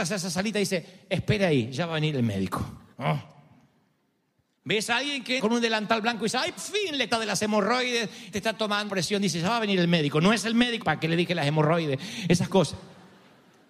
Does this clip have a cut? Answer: yes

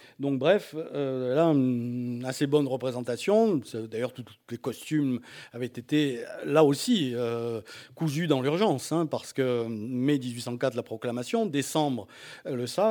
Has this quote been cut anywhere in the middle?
no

